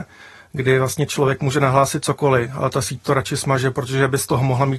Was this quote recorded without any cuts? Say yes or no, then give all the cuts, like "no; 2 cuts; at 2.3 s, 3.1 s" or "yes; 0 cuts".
yes; 0 cuts